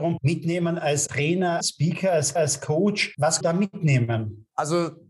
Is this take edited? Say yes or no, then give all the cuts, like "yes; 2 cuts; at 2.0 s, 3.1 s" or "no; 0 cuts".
yes; 4 cuts; at 1.1 s, 1.6 s, 2.4 s, 3.4 s